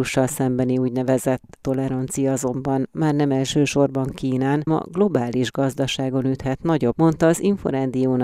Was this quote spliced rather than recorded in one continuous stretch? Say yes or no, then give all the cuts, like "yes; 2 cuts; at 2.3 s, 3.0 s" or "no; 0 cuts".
yes; 3 cuts; at 1.6 s, 4.7 s, 6.9 s